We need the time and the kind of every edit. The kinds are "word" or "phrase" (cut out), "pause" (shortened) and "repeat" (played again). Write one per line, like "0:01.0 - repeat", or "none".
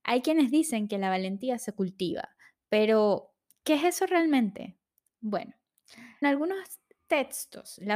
0:06.2 - word